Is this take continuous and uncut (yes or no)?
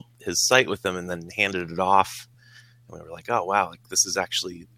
yes